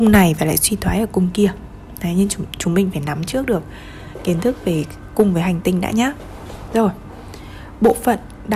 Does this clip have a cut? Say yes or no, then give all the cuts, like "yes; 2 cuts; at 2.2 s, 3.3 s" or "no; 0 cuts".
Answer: no; 0 cuts